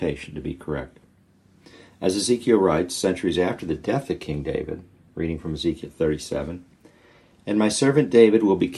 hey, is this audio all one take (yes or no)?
yes